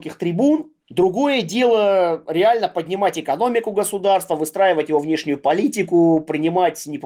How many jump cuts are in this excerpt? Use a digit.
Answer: 0